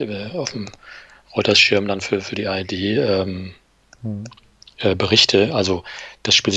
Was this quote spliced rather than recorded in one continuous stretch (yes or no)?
no